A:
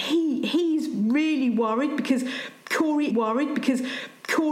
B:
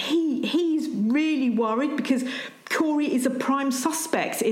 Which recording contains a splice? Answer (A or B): A